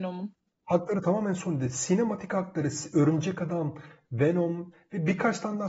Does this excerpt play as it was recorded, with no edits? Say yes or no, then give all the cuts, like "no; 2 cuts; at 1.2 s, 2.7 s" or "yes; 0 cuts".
yes; 0 cuts